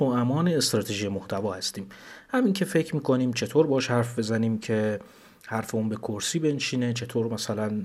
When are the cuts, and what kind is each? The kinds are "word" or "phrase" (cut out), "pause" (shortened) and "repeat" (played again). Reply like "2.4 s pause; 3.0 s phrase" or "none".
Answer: none